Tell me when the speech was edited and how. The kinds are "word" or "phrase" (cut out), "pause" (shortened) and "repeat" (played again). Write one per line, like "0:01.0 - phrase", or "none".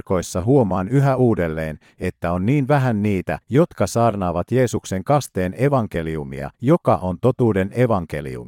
0:03.4 - pause
0:06.5 - pause